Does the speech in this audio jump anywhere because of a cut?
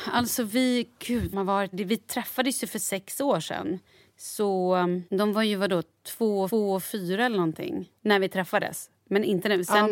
yes; 5 cuts; at 1.3 s, 1.7 s, 5.1 s, 6.5 s, 8.0 s

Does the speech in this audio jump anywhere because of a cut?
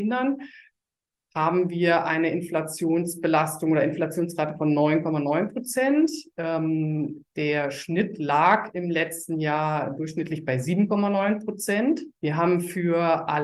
yes; 1 cut; at 12.2 s

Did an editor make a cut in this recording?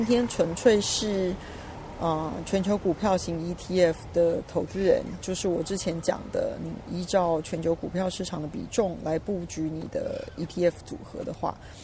no; 0 cuts

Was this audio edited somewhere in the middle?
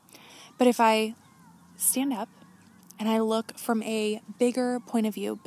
no; 0 cuts

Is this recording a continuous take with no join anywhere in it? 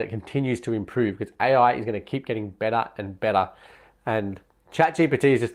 yes; 0 cuts

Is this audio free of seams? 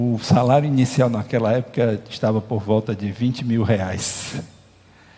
yes; 0 cuts

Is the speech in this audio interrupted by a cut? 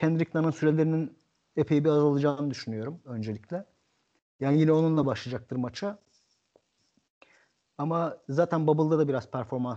no; 0 cuts

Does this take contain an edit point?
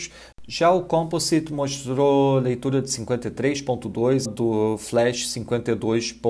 yes; 1 cut; at 4.2 s

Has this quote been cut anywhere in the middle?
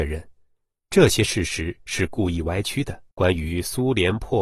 yes; 1 cut; at 3.1 s

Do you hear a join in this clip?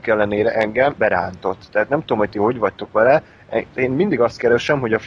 yes; 1 cut; at 1.0 s

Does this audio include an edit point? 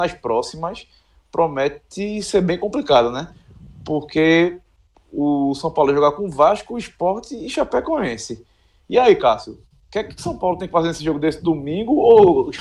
no; 0 cuts

